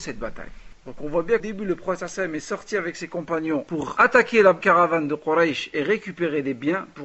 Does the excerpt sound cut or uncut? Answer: cut